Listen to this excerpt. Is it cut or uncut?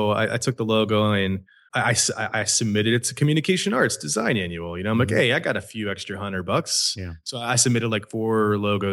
cut